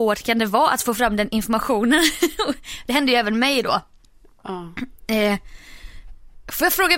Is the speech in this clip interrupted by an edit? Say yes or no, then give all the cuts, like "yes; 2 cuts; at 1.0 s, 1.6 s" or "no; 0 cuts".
no; 0 cuts